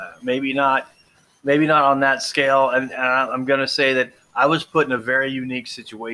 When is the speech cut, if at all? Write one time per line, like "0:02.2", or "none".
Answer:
none